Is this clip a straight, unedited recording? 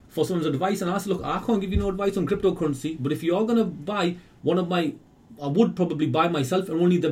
yes; 0 cuts

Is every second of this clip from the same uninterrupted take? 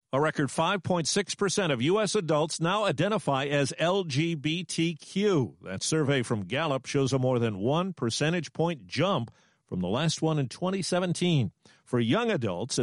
yes; 0 cuts

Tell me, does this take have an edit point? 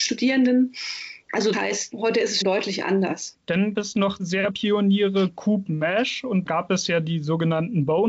yes; 8 cuts; at 1.5 s, 1.9 s, 2.4 s, 3.7 s, 4.2 s, 4.5 s, 5.7 s, 6.5 s

